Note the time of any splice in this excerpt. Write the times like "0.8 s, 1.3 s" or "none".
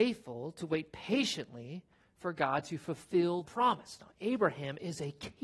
3.4 s